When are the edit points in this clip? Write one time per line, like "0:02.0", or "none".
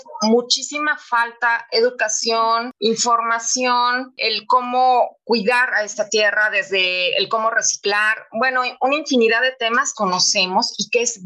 0:09.9